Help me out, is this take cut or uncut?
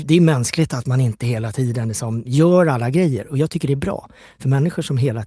uncut